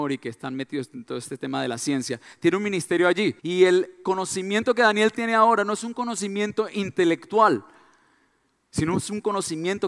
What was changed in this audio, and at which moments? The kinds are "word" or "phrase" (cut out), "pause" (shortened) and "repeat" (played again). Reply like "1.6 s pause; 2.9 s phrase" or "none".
3.4 s pause